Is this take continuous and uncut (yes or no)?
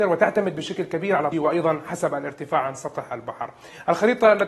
no